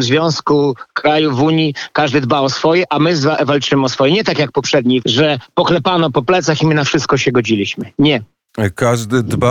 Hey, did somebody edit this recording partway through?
yes; 1 cut; at 5.0 s

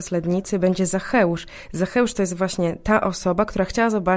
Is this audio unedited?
yes; 0 cuts

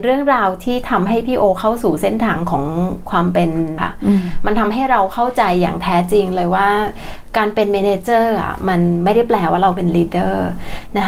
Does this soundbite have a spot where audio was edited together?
yes; 1 cut; at 3.8 s

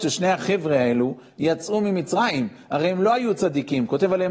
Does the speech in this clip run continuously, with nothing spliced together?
yes; 0 cuts

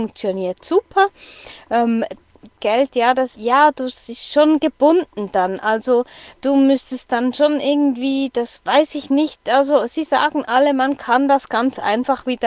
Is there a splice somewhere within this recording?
yes; 3 cuts; at 2.6 s, 3.3 s, 6.4 s

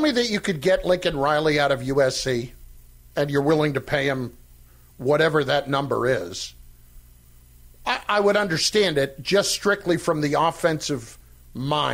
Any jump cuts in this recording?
no; 0 cuts

